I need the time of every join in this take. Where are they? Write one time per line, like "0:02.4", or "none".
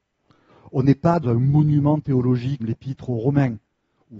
0:01.2
0:02.6